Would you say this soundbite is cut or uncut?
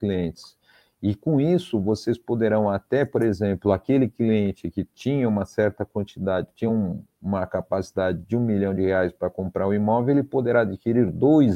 uncut